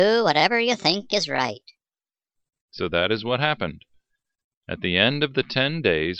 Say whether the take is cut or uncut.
uncut